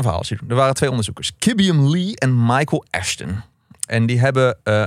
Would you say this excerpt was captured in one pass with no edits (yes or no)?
yes